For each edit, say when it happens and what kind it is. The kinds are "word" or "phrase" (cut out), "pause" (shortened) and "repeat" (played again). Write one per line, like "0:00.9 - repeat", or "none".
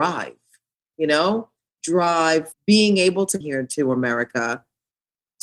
0:01.7 - word
0:02.5 - word
0:03.4 - word